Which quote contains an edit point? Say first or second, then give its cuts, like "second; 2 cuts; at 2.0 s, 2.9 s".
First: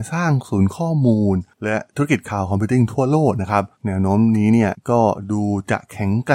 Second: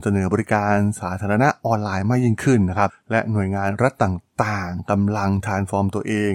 first; 1 cut; at 3.7 s